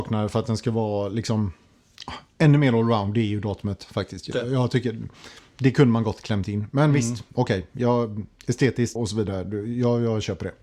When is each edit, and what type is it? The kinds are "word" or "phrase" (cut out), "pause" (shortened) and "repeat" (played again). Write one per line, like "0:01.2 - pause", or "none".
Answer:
0:04.3 - word
0:09.0 - word